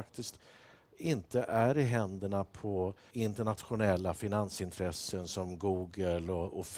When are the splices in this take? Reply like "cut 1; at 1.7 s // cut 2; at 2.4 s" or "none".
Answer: cut 1; at 3.1 s